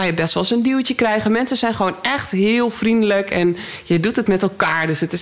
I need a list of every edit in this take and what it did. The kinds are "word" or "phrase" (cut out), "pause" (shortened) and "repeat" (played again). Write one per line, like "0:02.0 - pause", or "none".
none